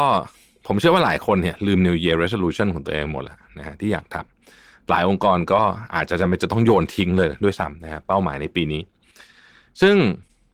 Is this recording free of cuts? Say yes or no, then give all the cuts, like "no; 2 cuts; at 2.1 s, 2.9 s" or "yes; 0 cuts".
yes; 0 cuts